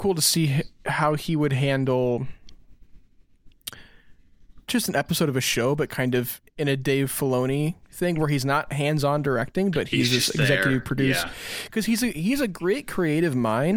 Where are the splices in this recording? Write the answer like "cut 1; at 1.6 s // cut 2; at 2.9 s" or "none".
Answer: cut 1; at 4.7 s // cut 2; at 6.5 s